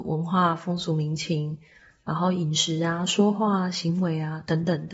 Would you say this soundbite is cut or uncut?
uncut